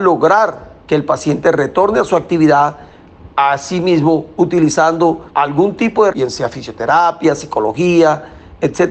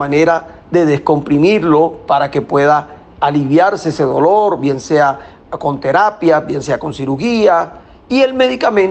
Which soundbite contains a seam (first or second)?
first